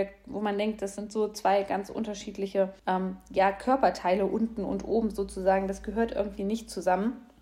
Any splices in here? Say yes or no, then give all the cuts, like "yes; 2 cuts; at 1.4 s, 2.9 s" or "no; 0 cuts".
yes; 1 cut; at 2.8 s